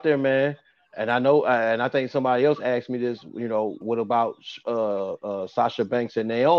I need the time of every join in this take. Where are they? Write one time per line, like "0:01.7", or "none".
0:03.8